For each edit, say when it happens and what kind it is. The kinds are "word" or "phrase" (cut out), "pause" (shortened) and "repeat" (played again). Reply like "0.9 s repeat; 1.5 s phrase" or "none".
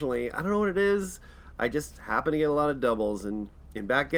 none